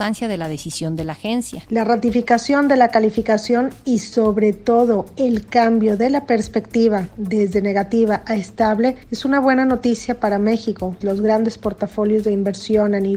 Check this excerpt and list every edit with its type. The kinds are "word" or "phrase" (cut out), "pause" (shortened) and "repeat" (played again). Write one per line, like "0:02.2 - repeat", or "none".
0:11.0 - word